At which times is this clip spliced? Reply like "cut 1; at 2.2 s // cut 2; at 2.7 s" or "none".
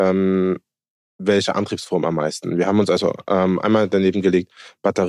none